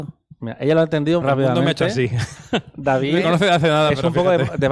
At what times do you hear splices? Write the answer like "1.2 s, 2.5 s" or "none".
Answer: 1.2 s